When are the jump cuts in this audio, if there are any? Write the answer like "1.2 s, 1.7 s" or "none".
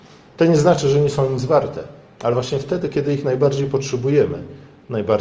none